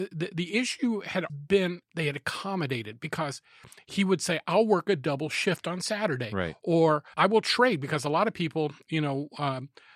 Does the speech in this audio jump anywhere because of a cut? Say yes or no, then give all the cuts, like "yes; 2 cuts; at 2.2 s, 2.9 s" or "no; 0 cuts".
yes; 2 cuts; at 1.3 s, 7.1 s